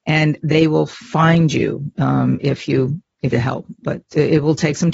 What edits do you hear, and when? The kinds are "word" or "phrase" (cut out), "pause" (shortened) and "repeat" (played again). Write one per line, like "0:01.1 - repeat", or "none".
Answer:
0:03.3 - phrase

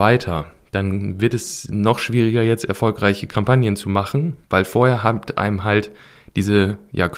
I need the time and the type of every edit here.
0:04.4 - pause

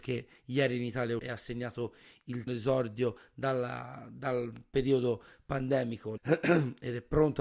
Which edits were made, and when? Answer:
0:01.2 - word
0:02.5 - phrase
0:06.2 - phrase

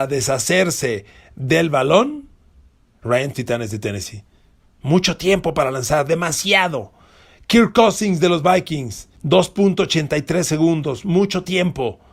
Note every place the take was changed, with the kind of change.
0:03.3 - phrase
0:09.2 - pause

